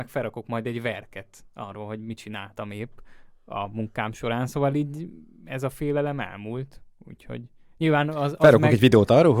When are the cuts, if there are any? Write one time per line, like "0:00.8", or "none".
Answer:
none